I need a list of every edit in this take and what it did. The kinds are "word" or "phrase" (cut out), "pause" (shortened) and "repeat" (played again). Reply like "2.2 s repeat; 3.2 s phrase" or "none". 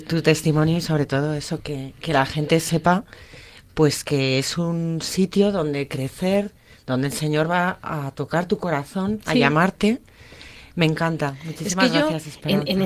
1.6 s word